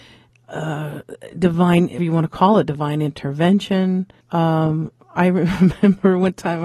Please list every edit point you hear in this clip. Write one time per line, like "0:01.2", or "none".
0:02.0
0:04.2